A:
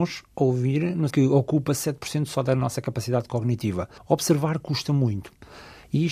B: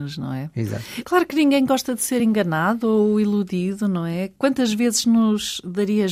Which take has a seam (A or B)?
A